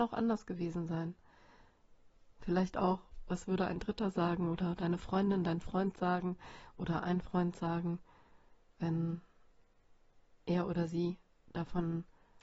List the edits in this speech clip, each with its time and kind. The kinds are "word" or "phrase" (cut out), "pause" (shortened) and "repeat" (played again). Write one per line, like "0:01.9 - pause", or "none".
none

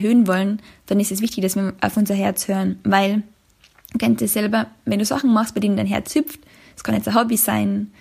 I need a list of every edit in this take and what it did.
none

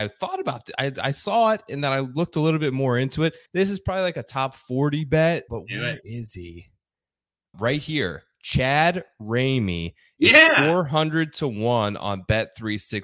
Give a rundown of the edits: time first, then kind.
0:03.5 - pause
0:05.5 - word
0:07.5 - word

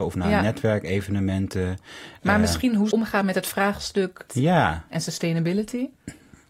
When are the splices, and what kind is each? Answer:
0:02.9 - word
0:04.3 - word

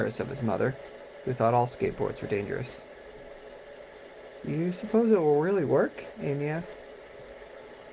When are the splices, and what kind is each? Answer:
none

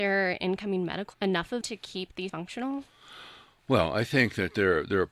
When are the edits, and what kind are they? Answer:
0:01.1 - word
0:01.6 - word
0:02.3 - word

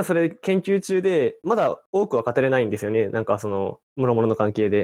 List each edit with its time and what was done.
0:03.9 - pause

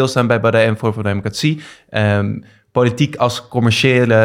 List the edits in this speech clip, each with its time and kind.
none

